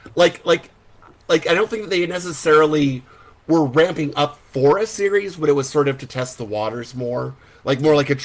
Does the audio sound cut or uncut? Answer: uncut